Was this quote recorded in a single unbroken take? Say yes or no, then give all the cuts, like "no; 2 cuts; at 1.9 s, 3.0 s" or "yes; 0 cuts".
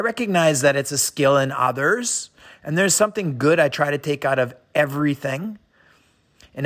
yes; 0 cuts